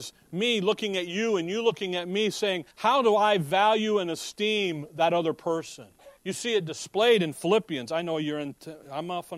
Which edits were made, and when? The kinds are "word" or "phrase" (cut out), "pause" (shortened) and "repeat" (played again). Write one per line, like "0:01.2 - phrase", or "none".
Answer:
0:02.7 - pause
0:06.2 - pause